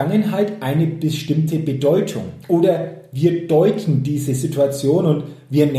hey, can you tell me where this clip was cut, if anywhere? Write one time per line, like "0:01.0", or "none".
none